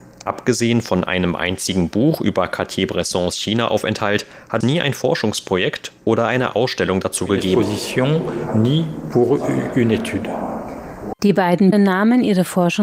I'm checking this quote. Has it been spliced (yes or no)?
yes